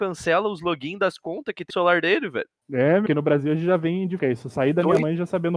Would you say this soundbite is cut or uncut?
cut